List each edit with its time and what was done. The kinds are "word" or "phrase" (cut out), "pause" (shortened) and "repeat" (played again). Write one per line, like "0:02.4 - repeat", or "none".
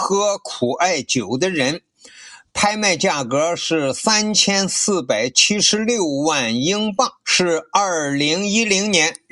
0:07.2 - pause